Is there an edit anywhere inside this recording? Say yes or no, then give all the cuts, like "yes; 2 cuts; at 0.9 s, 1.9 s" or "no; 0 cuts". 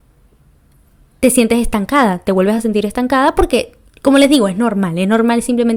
no; 0 cuts